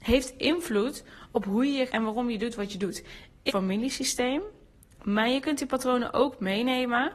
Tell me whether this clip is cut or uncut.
cut